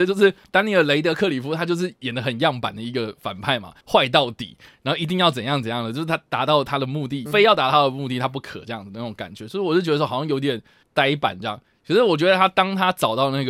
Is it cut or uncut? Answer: cut